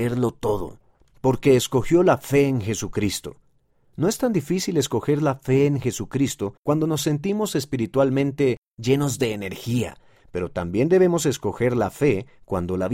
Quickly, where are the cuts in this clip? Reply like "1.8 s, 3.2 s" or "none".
6.6 s